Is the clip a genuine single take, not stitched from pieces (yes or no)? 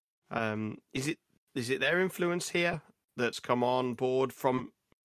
yes